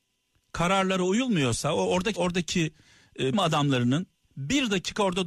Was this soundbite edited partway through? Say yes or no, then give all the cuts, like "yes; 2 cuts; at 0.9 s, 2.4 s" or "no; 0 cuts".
yes; 2 cuts; at 2.1 s, 3.3 s